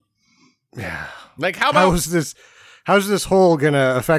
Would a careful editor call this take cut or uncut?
uncut